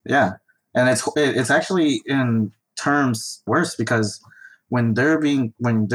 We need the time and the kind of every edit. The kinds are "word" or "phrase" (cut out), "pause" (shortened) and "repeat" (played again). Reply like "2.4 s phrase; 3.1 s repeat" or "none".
3.5 s phrase